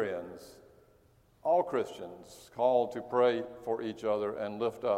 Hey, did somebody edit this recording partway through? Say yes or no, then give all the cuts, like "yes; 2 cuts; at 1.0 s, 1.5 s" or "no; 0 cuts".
no; 0 cuts